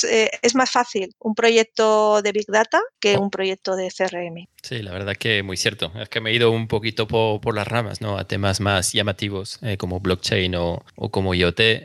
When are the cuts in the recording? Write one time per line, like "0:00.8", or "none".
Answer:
0:01.1
0:02.9

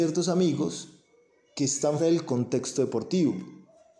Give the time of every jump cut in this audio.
0:02.0

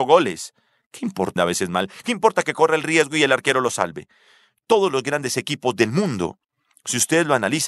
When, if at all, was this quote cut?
0:01.4

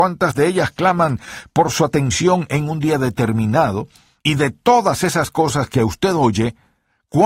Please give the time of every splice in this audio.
none

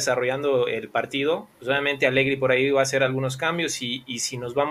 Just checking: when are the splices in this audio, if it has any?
0:01.5

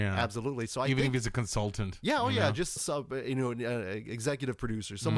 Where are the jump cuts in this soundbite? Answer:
0:02.8

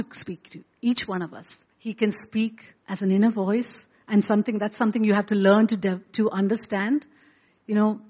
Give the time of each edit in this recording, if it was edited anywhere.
0:01.7
0:02.8

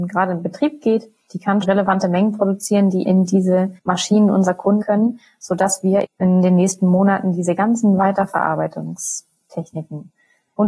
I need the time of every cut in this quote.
0:01.6
0:03.1
0:03.8
0:04.8
0:06.0

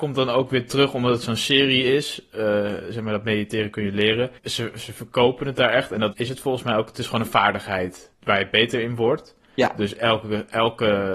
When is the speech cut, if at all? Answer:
0:04.4
0:06.1
0:08.2

